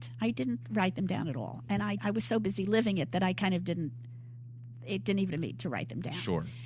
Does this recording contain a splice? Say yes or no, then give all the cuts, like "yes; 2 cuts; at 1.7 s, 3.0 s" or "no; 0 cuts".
yes; 2 cuts; at 2.0 s, 5.3 s